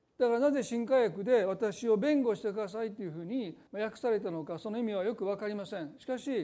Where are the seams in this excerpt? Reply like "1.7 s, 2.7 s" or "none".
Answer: 3.7 s